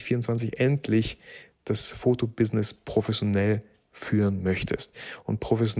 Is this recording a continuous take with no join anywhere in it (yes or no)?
yes